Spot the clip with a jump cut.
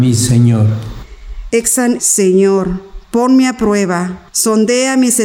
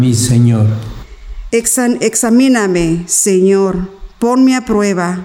first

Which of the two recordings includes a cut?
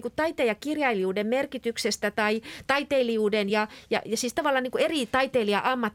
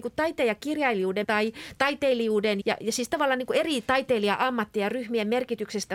second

